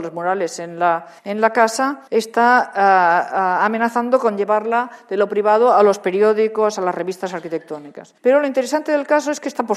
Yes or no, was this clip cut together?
yes